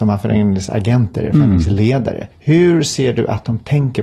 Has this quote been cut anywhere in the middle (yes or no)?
yes